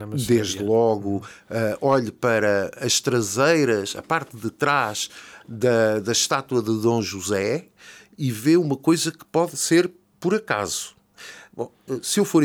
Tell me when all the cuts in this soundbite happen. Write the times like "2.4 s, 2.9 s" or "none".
none